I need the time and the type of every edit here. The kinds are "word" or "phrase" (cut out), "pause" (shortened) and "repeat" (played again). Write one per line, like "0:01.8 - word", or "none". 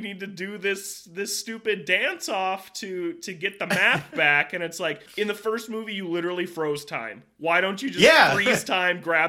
0:05.1 - pause